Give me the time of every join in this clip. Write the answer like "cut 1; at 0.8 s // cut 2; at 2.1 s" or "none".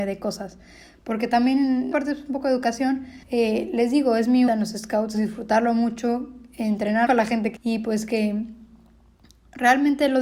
cut 1; at 1.9 s // cut 2; at 3.2 s // cut 3; at 4.5 s // cut 4; at 5.1 s // cut 5; at 7.1 s // cut 6; at 7.6 s